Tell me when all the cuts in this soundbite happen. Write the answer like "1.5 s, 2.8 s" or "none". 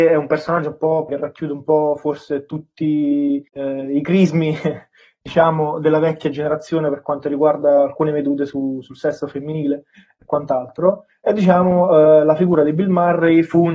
1.1 s, 3.5 s